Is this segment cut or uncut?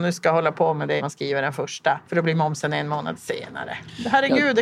cut